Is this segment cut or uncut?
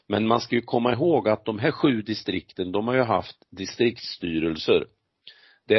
uncut